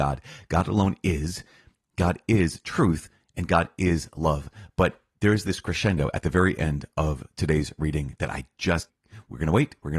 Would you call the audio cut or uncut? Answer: uncut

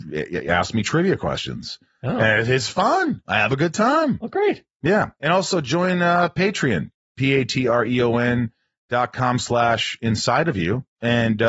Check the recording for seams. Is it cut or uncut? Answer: uncut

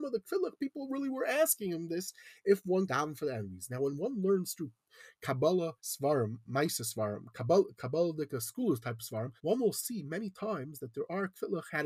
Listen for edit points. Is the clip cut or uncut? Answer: cut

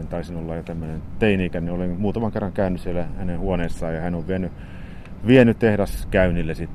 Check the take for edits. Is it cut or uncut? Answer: uncut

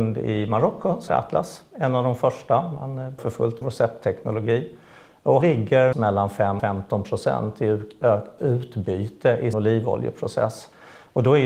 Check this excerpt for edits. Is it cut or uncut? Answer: cut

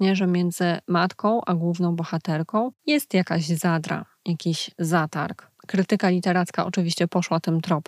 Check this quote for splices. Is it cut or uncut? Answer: uncut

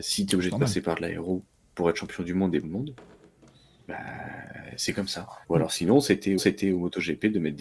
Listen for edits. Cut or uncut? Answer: cut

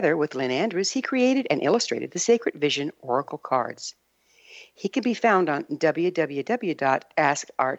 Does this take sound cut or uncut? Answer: uncut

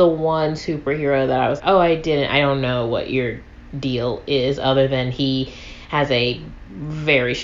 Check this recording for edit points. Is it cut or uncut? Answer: cut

